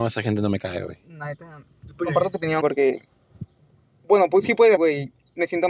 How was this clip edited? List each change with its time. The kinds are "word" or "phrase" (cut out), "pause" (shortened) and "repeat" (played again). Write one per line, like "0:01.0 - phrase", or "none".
0:02.6 - word
0:04.8 - word